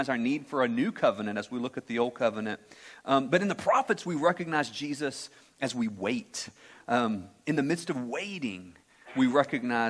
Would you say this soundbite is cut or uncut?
uncut